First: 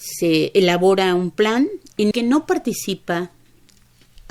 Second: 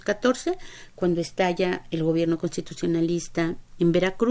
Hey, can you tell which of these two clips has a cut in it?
first; 1 cut; at 2.1 s

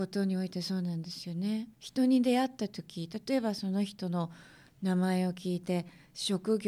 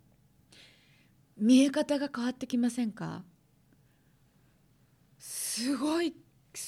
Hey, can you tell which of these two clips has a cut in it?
first; 1 cut; at 1.7 s

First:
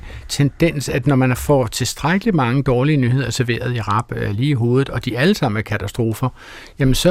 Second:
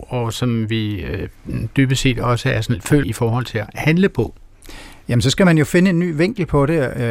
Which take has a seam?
second; 1 cut; at 3.0 s

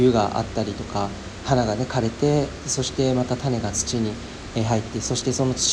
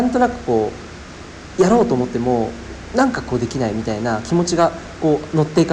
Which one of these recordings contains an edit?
first; 1 cut; at 1.4 s

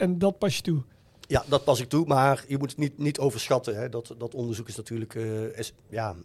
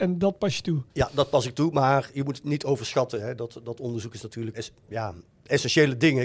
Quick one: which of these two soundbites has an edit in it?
second; 3 cuts; at 0.9 s, 2.4 s, 4.5 s

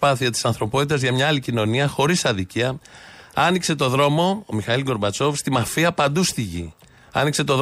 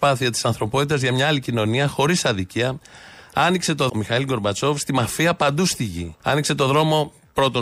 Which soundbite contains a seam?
second; 2 cuts; at 3.9 s, 6.2 s

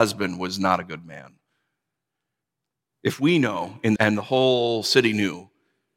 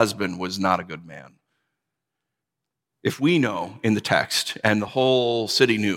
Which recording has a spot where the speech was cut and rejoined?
first; 1 cut; at 4.0 s

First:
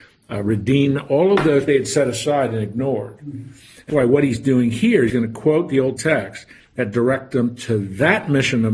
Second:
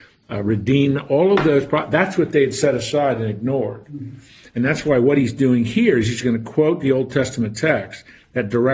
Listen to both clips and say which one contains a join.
first; 4 cuts; at 1.7 s, 3.9 s, 5.1 s, 6.0 s

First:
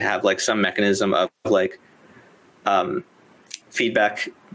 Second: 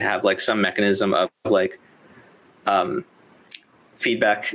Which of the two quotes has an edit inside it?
first; 1 cut; at 3.6 s

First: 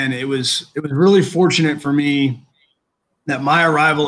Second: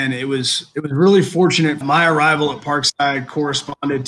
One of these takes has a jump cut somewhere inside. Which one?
second; 1 cut; at 1.8 s

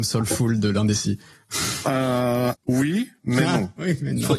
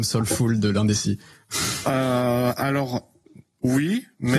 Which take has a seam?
first; 1 cut; at 2.5 s

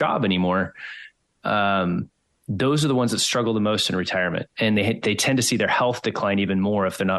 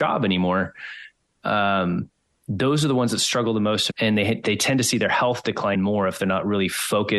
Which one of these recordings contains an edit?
second; 2 cuts; at 3.9 s, 5.7 s

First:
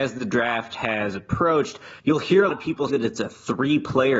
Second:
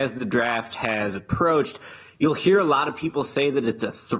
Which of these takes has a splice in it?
first; 3 cuts; at 2.0 s, 2.5 s, 2.9 s

